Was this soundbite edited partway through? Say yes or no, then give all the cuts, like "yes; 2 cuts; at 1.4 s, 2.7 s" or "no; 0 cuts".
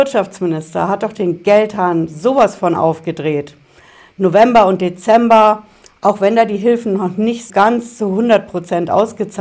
yes; 1 cut; at 7.5 s